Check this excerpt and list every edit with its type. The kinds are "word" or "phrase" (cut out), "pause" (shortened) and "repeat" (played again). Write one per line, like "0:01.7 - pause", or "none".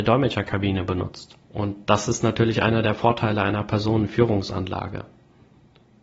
0:01.4 - pause